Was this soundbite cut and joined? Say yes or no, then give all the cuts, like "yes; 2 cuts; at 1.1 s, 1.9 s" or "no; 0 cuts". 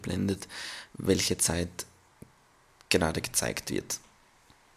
no; 0 cuts